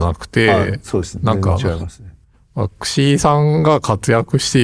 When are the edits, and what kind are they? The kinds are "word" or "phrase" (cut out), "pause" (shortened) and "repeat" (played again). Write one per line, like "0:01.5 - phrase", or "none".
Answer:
0:02.3 - pause